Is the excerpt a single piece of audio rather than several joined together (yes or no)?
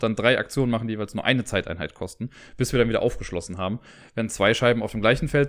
yes